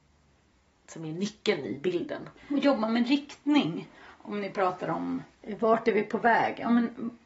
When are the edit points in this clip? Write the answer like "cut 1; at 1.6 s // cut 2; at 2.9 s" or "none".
cut 1; at 2.4 s // cut 2; at 5.3 s